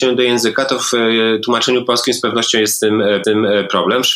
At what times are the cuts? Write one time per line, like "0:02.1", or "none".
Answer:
0:03.2